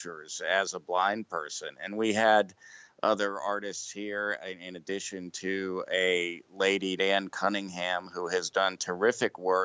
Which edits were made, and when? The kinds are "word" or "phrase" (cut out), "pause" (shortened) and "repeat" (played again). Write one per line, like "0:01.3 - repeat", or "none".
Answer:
0:07.0 - word